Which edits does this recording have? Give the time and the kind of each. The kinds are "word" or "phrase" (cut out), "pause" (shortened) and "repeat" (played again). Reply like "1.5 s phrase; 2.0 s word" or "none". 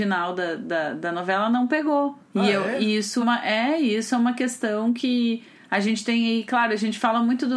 2.2 s pause; 3.2 s word